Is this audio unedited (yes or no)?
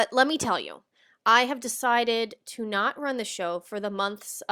yes